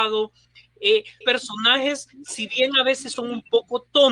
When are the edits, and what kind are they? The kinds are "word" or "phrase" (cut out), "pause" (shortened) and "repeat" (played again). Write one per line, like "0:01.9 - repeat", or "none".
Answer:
0:01.2 - word

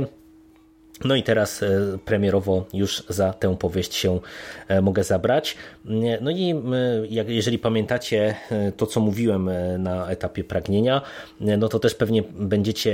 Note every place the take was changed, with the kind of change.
none

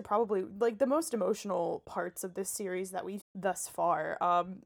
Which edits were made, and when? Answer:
0:03.2 - word

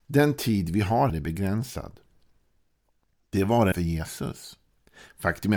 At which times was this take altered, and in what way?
0:01.1 - word
0:03.7 - word

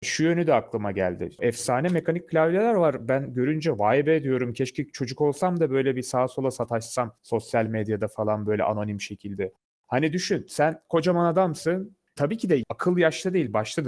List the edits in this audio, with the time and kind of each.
none

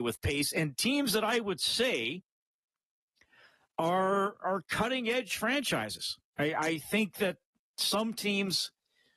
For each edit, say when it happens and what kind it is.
none

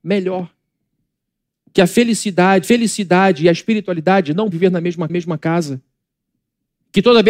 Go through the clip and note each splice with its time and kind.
0:02.6 - repeat
0:04.5 - word
0:05.1 - repeat

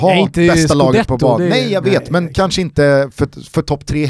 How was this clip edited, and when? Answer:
none

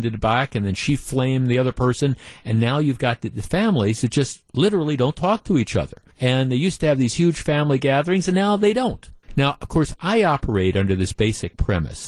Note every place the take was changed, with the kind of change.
0:06.1 - pause
0:09.2 - pause

